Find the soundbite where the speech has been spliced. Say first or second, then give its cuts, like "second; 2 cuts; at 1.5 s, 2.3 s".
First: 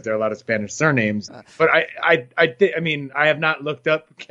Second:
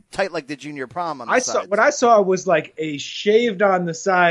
first; 1 cut; at 1.3 s